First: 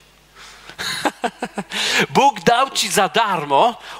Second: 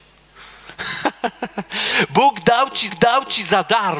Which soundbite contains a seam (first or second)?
second